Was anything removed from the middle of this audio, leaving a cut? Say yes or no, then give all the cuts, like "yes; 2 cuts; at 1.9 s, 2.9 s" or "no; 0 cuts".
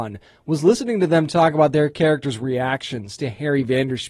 no; 0 cuts